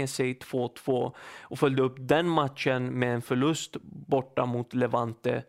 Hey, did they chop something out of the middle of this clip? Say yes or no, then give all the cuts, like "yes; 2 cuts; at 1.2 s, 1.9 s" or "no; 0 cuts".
no; 0 cuts